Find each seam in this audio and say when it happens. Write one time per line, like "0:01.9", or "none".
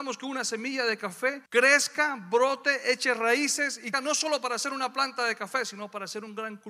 0:01.5
0:03.9

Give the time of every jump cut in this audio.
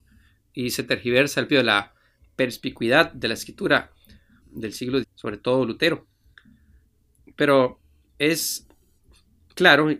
0:01.5
0:04.4
0:05.0

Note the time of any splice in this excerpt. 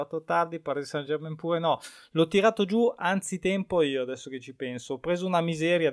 none

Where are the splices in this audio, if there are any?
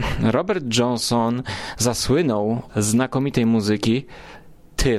0:02.7

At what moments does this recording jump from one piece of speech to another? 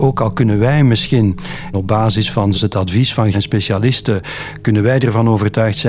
0:01.7
0:02.5
0:03.3

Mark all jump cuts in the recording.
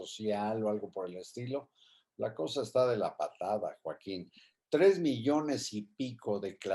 none

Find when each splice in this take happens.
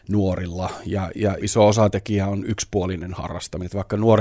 0:01.4

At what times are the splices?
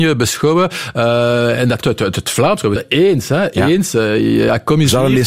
0:01.8
0:02.8

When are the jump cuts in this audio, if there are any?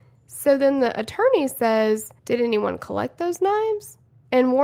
0:02.2

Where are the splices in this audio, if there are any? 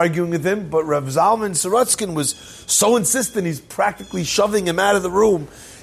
none

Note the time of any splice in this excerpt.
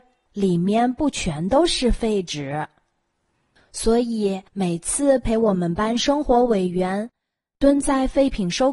0:04.5

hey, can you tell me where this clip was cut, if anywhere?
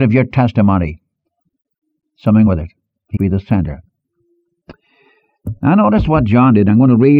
0:02.5
0:03.2

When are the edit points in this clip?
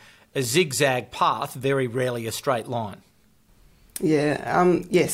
none

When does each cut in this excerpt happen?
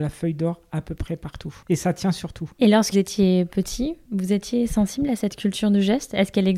0:01.6
0:02.5
0:02.9

